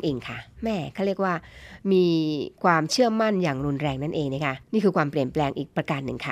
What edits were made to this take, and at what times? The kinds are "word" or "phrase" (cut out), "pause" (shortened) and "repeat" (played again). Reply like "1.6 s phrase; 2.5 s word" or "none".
4.6 s pause

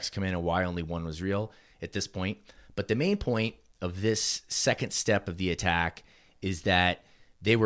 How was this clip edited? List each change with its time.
none

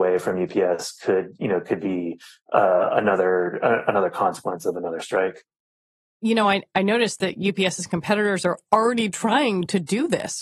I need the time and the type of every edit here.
none

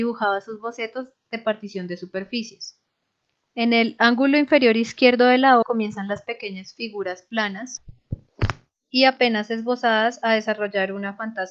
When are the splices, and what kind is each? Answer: 5.6 s word

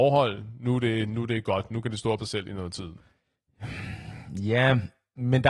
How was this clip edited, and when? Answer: 2.2 s word

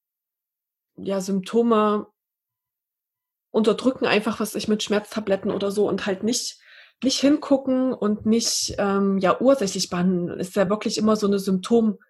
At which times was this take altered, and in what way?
none

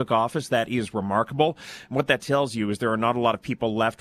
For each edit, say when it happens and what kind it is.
none

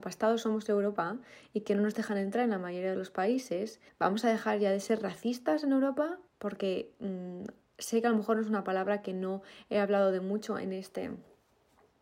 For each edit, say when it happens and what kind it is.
3.9 s pause; 6.3 s pause

